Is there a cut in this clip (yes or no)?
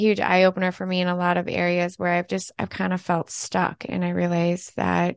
no